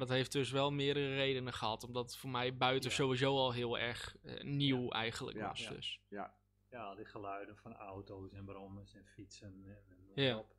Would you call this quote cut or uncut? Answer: uncut